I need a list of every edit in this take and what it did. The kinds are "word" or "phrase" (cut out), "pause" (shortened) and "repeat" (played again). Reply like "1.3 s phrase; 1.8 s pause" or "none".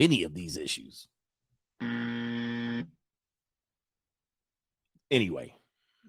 none